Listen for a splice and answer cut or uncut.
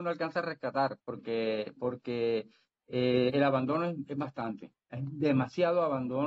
uncut